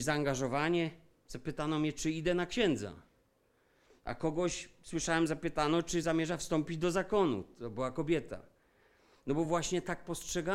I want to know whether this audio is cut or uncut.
uncut